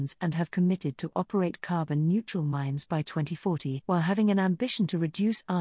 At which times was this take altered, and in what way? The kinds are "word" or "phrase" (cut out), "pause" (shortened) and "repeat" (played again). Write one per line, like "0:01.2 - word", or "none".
0:03.8 - pause